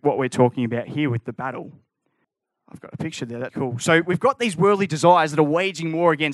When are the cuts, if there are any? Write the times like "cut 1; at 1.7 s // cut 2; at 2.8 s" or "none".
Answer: cut 1; at 3.5 s